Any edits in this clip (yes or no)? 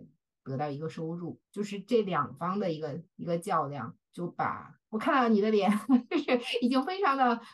yes